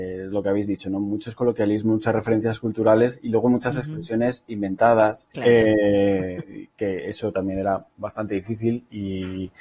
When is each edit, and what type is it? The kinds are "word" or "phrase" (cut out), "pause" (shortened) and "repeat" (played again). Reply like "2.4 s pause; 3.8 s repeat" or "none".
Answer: 5.3 s pause